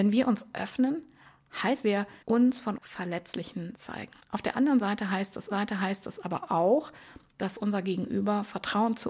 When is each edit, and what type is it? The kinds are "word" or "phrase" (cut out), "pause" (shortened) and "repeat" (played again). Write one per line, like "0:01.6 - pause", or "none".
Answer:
0:01.8 - phrase
0:02.2 - pause
0:02.8 - word
0:03.7 - word
0:04.2 - pause
0:05.5 - repeat